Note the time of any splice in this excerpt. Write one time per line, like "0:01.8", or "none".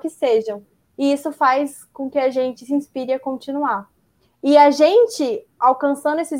none